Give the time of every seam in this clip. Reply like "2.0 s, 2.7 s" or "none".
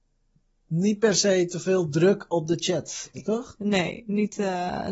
3.1 s